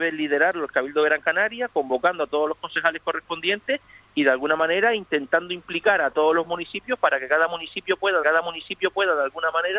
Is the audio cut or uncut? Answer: cut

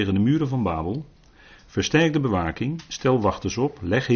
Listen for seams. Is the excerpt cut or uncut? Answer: uncut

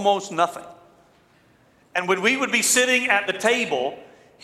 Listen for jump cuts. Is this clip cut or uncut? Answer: uncut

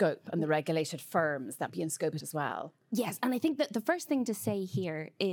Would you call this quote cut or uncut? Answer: cut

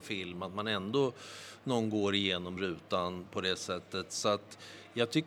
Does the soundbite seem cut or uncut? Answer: uncut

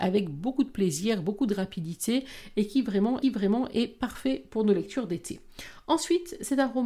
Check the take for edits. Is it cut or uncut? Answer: cut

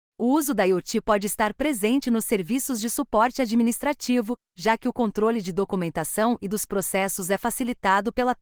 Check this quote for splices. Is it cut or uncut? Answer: uncut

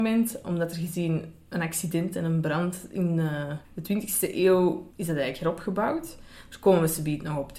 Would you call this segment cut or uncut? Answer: cut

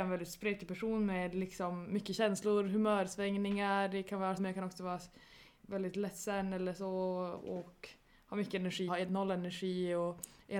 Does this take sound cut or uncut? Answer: cut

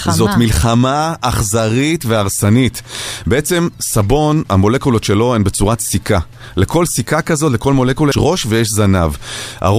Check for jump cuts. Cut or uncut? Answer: cut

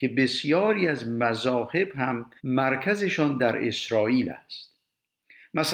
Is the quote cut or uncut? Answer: cut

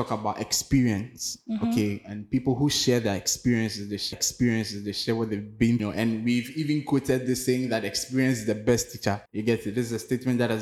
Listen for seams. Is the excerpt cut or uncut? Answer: cut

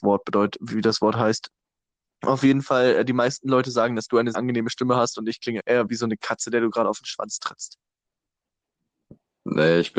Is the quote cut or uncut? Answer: cut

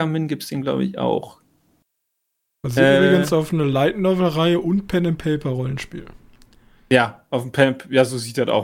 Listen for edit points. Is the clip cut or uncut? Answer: uncut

